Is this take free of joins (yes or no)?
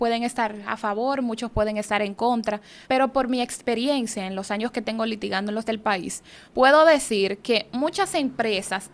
no